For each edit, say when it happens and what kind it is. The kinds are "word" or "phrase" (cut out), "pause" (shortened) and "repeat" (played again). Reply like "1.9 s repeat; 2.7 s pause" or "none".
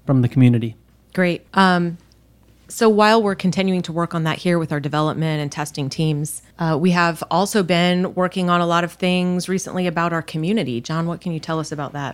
1.5 s pause; 6.5 s pause